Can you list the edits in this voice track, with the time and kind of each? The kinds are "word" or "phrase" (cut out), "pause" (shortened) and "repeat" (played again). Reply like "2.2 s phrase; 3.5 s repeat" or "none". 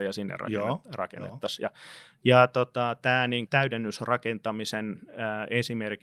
3.5 s word